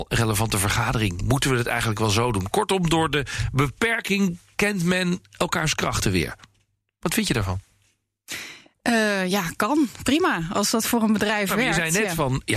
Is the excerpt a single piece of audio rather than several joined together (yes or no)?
yes